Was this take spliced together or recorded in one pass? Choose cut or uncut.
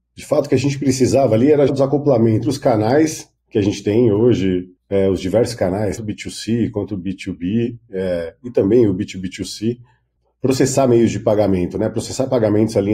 cut